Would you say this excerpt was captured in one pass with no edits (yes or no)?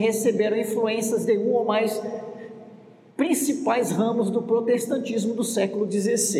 yes